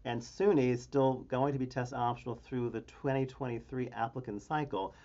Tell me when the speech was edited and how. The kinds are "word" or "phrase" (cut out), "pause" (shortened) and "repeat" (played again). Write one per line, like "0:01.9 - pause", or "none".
none

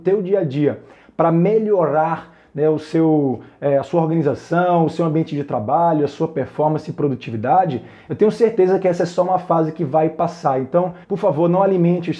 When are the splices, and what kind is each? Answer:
0:11.0 - pause

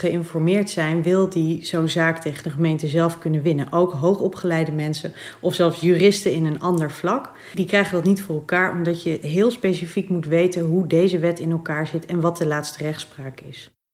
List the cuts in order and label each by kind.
0:07.5 - word

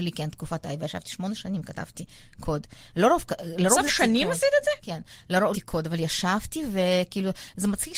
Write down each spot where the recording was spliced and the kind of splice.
0:03.9 - word
0:05.5 - phrase

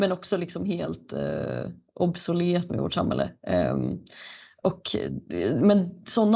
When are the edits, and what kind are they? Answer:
0:02.7 - word

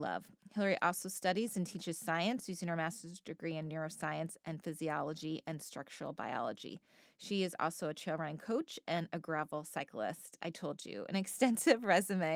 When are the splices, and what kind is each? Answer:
none

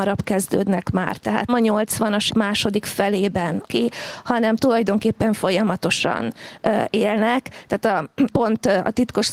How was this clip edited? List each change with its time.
0:01.5 - word
0:02.3 - word
0:03.7 - word
0:08.3 - word

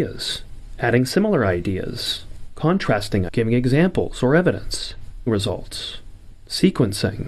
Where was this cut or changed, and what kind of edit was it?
0:03.3 - word
0:05.3 - word

